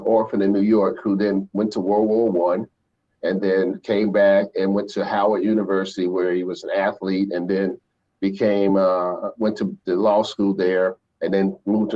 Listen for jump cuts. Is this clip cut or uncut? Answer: uncut